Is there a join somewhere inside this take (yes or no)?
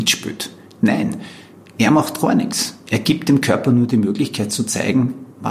no